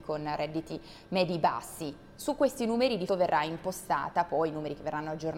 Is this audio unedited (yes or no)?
no